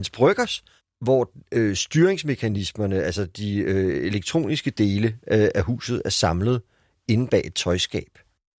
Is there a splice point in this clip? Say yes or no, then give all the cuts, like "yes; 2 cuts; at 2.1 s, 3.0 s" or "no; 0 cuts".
no; 0 cuts